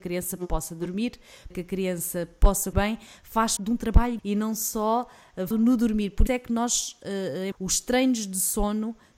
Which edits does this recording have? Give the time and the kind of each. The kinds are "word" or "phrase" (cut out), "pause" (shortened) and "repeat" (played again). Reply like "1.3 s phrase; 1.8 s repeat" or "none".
1.5 s word; 2.7 s word; 3.6 s word; 4.2 s word; 5.5 s word; 6.3 s word; 7.5 s word